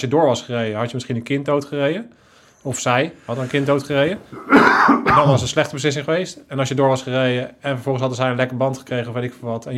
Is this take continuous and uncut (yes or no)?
yes